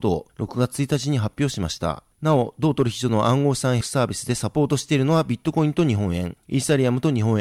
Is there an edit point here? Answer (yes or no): yes